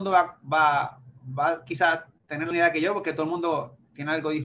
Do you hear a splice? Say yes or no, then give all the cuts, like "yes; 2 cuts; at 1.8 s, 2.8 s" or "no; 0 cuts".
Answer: yes; 1 cut; at 2.5 s